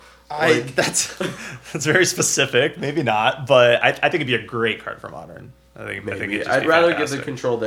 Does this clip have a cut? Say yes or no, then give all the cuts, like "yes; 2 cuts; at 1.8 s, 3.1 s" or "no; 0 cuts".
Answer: no; 0 cuts